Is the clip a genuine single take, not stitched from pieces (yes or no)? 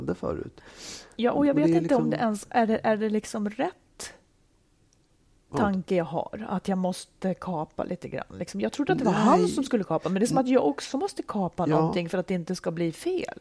yes